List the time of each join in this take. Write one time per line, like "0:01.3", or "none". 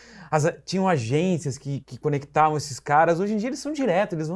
0:01.8